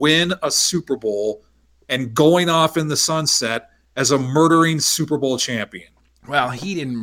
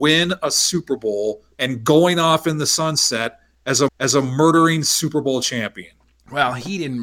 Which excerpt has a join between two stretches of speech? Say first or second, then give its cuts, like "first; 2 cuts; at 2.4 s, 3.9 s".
second; 2 cuts; at 1.5 s, 3.9 s